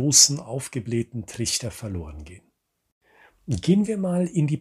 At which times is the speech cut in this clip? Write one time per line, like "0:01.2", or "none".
none